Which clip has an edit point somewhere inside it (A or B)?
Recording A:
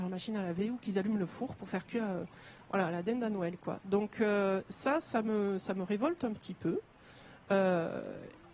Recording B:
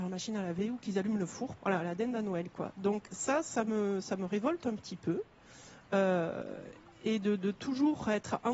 B